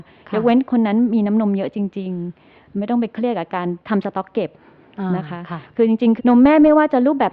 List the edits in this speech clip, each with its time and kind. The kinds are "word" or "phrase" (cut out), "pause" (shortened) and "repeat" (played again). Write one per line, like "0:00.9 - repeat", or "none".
0:03.8 - pause
0:06.2 - phrase